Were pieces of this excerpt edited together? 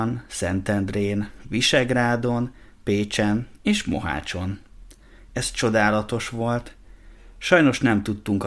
no; 0 cuts

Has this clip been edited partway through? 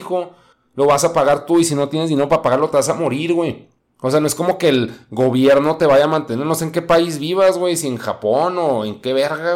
no; 0 cuts

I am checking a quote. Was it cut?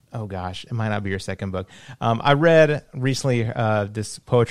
no; 0 cuts

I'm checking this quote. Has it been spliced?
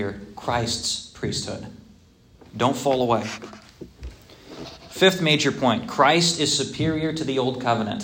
no; 0 cuts

